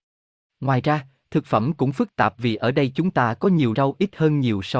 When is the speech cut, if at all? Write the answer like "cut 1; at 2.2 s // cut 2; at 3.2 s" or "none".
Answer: cut 1; at 3.7 s